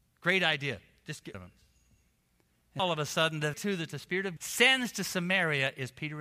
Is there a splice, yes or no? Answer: yes